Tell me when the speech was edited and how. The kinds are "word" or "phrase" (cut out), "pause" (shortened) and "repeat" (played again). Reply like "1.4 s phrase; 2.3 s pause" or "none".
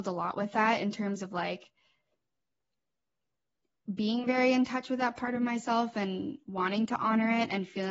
none